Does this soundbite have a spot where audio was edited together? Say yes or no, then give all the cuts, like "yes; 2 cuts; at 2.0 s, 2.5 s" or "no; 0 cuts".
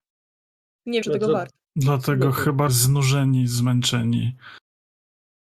yes; 3 cuts; at 1.0 s, 1.6 s, 2.7 s